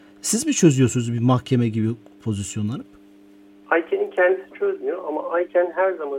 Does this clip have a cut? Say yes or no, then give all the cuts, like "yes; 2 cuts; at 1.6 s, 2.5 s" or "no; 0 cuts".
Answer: no; 0 cuts